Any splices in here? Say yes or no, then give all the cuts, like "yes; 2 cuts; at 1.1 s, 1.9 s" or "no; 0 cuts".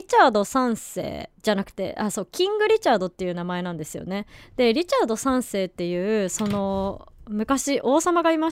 yes; 1 cut; at 1.4 s